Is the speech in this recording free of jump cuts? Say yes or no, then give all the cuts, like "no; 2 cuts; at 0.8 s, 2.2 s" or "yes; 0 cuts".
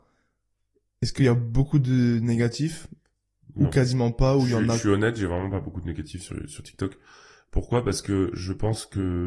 yes; 0 cuts